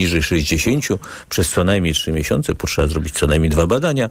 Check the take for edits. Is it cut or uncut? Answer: uncut